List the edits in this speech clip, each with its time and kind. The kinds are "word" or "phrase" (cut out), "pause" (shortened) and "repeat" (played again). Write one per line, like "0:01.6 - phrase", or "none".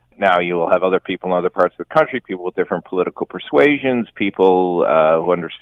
none